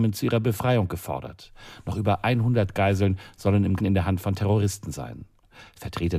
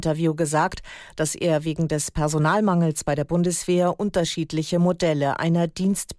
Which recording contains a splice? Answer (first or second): first